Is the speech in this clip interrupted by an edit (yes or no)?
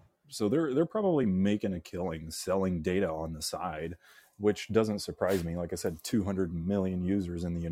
no